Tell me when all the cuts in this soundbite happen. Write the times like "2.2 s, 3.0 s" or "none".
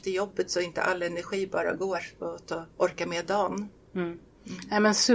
none